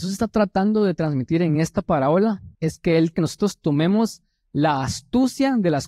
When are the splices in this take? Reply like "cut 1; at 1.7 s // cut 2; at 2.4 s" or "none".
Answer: cut 1; at 2.5 s // cut 2; at 3.1 s